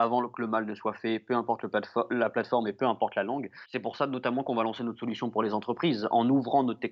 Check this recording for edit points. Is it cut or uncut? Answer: uncut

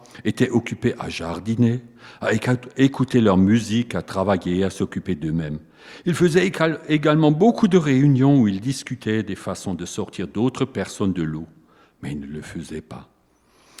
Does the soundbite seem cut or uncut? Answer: uncut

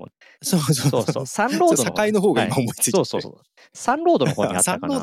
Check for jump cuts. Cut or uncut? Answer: uncut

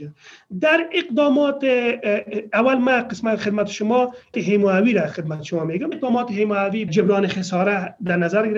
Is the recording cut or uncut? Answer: cut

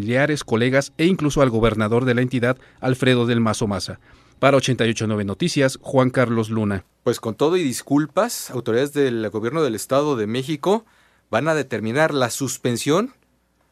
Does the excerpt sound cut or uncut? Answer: uncut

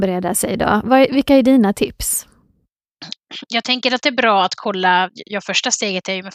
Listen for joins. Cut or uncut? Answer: uncut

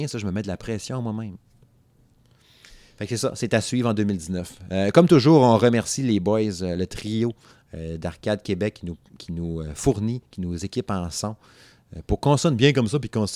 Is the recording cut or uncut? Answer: uncut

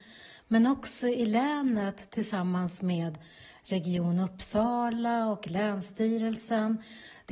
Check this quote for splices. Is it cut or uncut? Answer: uncut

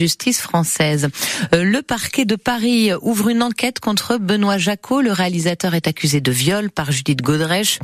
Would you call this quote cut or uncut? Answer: uncut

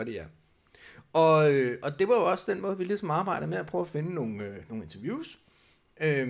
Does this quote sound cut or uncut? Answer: uncut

